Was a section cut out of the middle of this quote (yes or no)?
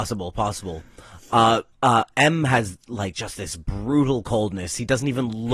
yes